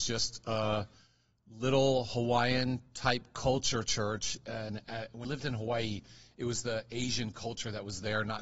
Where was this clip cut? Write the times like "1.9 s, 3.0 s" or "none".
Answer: 4.8 s, 5.2 s